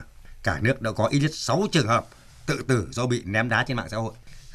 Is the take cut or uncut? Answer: uncut